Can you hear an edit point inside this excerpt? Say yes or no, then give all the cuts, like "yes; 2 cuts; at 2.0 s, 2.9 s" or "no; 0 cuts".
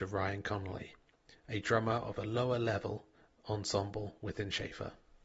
no; 0 cuts